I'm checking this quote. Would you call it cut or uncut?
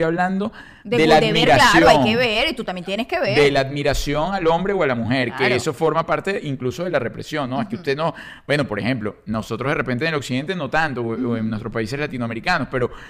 uncut